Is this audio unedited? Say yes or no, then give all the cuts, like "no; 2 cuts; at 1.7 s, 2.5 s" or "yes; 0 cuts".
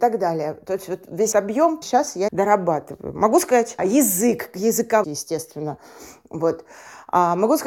no; 5 cuts; at 1.3 s, 1.8 s, 2.3 s, 3.8 s, 5.0 s